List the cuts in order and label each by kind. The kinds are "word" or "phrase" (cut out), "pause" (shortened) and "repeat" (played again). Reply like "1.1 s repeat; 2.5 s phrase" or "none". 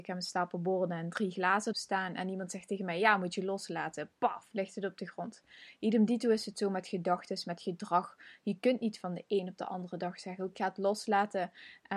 1.7 s word; 10.5 s word